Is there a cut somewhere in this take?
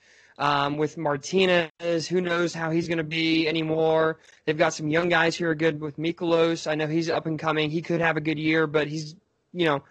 no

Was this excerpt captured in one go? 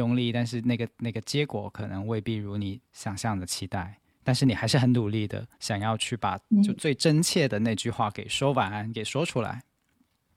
no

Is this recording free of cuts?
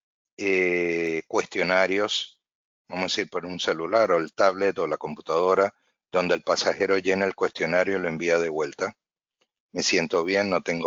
yes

